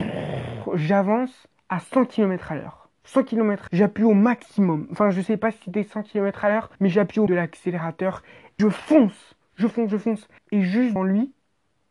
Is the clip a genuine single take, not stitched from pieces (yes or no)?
no